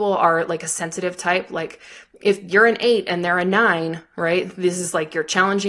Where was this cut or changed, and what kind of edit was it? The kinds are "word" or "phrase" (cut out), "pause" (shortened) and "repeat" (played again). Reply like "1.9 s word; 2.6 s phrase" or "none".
none